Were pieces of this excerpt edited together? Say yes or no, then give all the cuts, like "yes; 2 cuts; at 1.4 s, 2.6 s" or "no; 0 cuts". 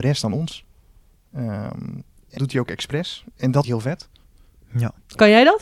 yes; 2 cuts; at 2.4 s, 3.6 s